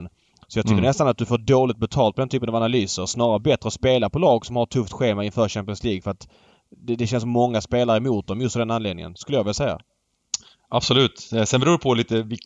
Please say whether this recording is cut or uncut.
uncut